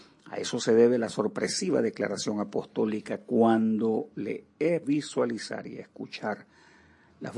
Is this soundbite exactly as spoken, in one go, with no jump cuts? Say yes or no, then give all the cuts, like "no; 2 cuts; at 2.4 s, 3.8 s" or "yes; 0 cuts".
no; 1 cut; at 4.8 s